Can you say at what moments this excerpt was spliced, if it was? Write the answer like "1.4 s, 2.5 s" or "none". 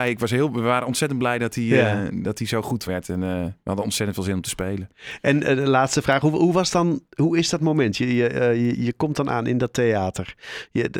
2.9 s